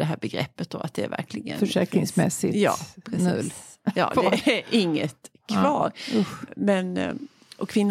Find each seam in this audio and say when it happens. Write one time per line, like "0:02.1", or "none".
none